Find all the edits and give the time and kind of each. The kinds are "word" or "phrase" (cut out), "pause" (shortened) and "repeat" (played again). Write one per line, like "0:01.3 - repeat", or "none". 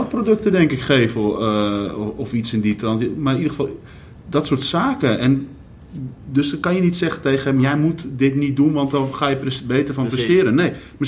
none